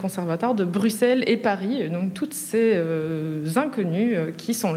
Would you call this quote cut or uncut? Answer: uncut